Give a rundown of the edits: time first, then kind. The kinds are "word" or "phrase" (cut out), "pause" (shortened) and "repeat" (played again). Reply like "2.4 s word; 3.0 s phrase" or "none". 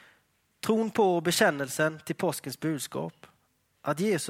none